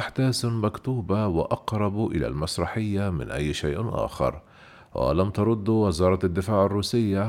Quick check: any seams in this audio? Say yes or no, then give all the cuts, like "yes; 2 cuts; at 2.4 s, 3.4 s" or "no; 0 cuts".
no; 0 cuts